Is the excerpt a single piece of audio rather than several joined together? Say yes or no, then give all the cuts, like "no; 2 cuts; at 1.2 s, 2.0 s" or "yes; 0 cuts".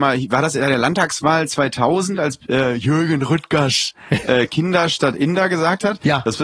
yes; 0 cuts